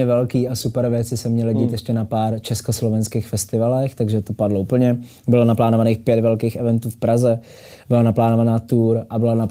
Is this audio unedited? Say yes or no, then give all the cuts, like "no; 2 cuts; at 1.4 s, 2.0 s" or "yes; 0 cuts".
yes; 0 cuts